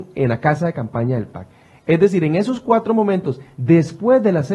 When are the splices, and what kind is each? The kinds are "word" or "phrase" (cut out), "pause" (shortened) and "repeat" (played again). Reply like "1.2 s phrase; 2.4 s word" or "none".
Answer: none